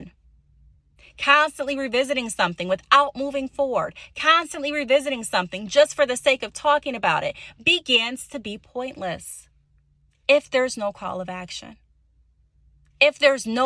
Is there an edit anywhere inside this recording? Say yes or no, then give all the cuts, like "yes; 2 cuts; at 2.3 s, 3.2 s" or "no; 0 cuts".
no; 0 cuts